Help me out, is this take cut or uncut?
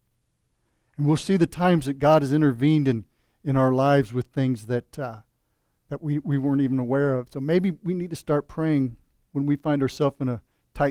uncut